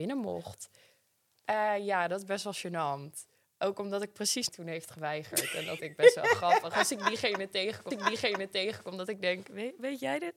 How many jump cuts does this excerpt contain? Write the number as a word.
three